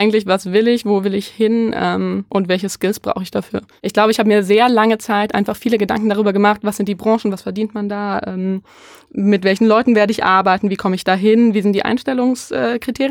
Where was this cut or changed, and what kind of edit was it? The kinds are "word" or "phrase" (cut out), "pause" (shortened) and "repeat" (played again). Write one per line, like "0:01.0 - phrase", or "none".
none